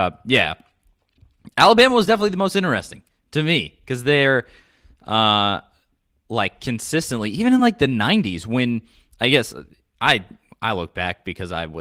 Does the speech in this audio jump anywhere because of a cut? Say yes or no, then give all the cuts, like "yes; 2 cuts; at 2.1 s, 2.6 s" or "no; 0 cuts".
no; 0 cuts